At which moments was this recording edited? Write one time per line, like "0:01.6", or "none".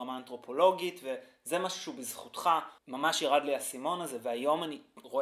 0:02.8